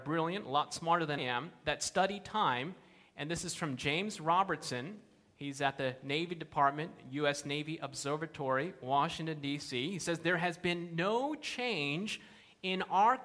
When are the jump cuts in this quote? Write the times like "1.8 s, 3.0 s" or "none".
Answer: 1.2 s